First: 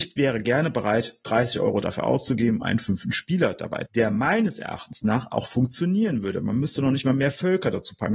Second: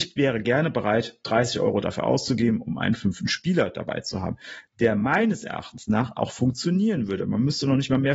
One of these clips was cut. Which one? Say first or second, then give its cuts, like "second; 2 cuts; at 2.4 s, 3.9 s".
first; 2 cuts; at 2.6 s, 3.9 s